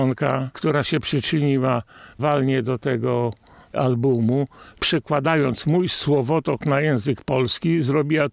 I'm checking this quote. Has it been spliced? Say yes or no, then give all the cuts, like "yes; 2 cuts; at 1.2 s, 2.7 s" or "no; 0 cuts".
no; 0 cuts